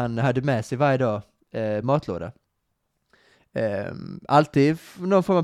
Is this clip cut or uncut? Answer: uncut